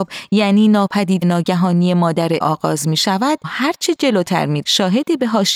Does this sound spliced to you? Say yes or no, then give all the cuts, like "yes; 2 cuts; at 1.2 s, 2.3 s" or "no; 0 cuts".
yes; 4 cuts; at 1.2 s, 2.4 s, 3.4 s, 4.6 s